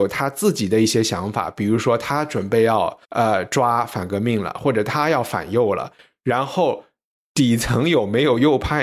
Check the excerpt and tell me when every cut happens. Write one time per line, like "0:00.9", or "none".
0:03.0